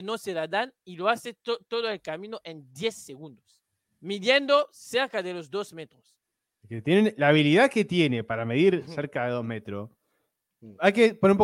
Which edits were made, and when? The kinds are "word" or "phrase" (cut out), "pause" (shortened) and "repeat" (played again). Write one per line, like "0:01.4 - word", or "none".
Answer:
0:03.8 - pause
0:06.3 - pause